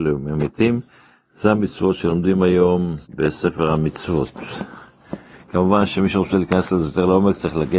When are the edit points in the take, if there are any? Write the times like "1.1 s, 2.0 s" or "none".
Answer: 3.0 s